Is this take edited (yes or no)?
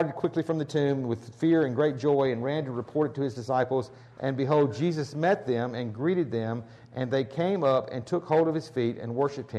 no